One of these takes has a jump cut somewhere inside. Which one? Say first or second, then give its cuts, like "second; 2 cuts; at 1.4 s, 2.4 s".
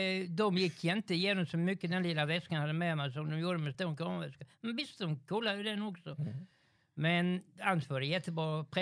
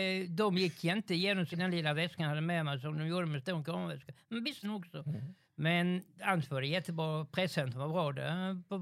second; 3 cuts; at 1.5 s, 4.6 s, 5.4 s